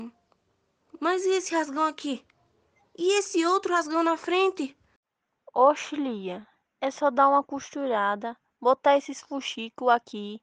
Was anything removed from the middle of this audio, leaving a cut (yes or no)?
no